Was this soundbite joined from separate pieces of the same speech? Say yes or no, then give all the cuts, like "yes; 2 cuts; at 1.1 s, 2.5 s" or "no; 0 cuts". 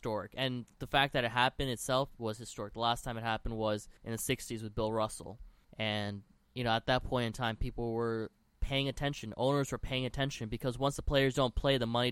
yes; 2 cuts; at 4.0 s, 5.6 s